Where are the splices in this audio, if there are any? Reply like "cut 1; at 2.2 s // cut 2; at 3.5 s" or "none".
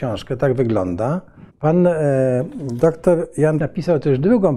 cut 1; at 1.5 s // cut 2; at 3.6 s